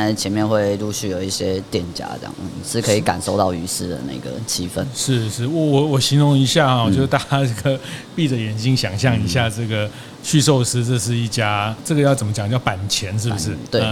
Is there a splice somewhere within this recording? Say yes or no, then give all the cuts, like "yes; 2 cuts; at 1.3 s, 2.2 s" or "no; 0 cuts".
no; 0 cuts